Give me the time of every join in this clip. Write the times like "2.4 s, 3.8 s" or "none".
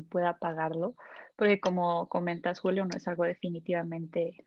none